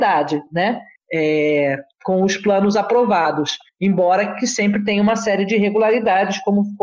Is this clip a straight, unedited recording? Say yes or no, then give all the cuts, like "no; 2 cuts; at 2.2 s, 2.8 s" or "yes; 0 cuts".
yes; 0 cuts